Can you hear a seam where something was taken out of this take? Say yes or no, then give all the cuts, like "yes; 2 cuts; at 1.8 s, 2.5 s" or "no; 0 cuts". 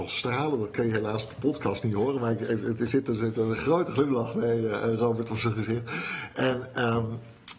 no; 0 cuts